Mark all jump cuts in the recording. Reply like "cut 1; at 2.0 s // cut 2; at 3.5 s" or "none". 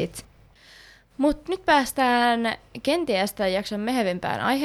none

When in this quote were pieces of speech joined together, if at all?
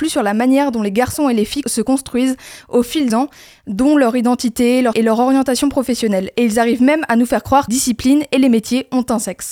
cut 1; at 1.6 s // cut 2; at 3.1 s // cut 3; at 4.9 s // cut 4; at 7.7 s

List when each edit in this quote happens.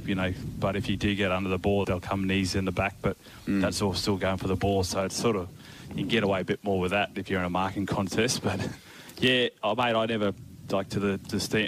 cut 1; at 1.8 s

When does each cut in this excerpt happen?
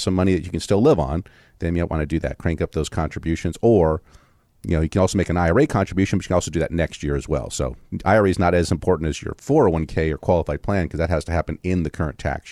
none

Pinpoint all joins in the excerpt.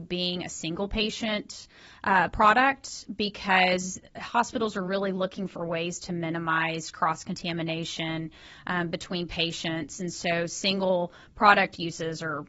none

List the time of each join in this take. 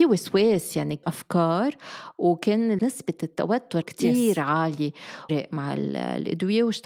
cut 1; at 1.0 s // cut 2; at 2.8 s // cut 3; at 3.8 s // cut 4; at 5.3 s

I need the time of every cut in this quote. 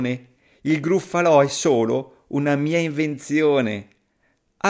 none

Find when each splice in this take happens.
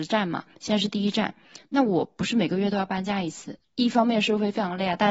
cut 1; at 3.6 s

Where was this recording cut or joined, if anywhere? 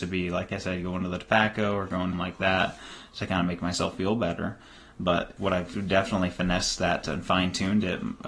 cut 1; at 2.1 s // cut 2; at 5.4 s

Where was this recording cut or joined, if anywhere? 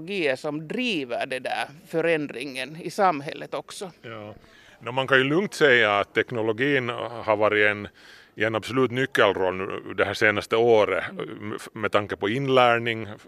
none

